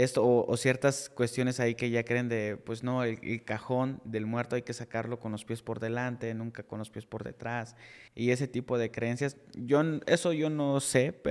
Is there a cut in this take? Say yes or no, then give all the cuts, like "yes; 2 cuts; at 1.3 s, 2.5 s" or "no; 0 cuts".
yes; 1 cut; at 8.1 s